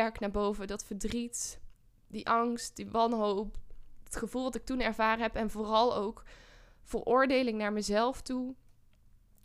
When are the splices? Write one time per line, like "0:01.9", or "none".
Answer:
none